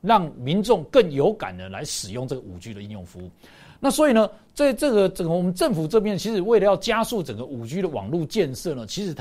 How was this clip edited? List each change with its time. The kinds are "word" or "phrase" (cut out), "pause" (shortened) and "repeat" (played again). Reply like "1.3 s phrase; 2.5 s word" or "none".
none